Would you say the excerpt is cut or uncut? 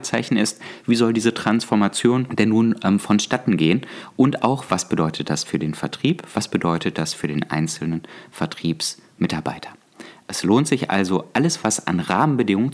uncut